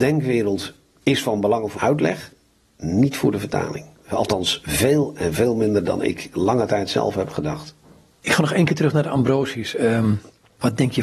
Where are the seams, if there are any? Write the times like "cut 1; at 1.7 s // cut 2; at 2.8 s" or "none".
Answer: cut 1; at 1.8 s